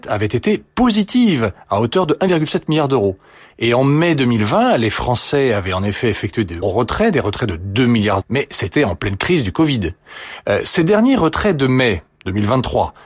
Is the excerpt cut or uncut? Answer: cut